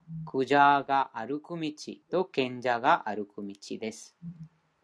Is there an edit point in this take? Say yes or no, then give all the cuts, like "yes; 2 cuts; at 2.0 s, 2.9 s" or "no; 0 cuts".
yes; 1 cut; at 2.0 s